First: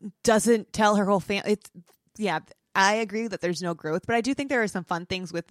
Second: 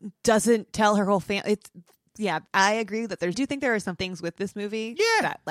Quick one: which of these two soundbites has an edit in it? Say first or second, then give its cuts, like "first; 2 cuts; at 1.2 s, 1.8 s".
second; 3 cuts; at 2.5 s, 3.3 s, 4.0 s